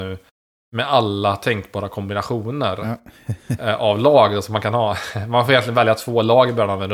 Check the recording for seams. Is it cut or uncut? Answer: uncut